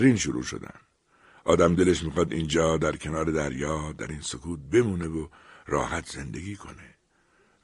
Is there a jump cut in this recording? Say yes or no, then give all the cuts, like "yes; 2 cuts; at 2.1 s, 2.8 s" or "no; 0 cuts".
no; 0 cuts